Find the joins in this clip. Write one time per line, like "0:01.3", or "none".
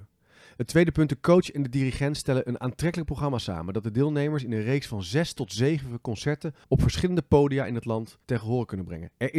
0:06.6
0:08.2